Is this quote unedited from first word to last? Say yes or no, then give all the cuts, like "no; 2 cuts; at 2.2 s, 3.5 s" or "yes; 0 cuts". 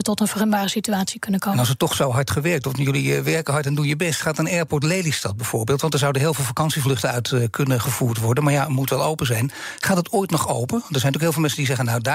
yes; 0 cuts